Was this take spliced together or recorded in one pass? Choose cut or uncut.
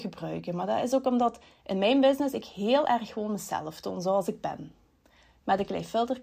uncut